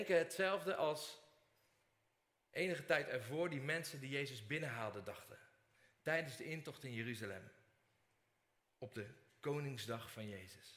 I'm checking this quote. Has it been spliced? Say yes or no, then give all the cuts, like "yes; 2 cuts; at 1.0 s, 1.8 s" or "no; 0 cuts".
no; 0 cuts